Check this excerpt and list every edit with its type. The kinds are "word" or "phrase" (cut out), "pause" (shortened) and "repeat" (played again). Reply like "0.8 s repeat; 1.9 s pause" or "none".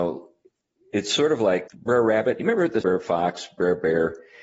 1.7 s word; 2.8 s phrase